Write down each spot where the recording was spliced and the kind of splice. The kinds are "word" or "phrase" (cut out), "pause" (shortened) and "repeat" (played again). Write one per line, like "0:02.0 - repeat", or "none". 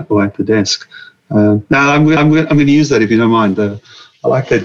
0:02.2 - repeat